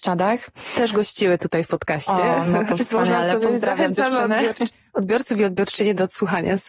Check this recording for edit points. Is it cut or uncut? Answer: uncut